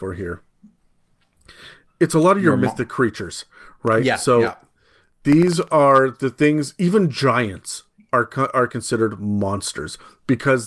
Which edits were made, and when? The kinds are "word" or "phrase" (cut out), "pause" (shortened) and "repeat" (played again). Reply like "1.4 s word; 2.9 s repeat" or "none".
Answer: none